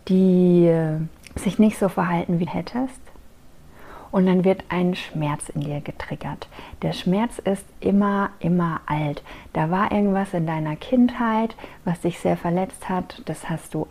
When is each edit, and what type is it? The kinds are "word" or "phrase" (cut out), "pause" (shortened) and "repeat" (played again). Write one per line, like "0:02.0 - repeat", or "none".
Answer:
0:02.5 - phrase